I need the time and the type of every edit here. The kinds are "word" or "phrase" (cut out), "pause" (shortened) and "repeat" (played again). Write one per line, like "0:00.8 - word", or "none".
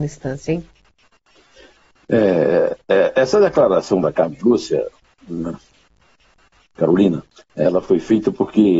none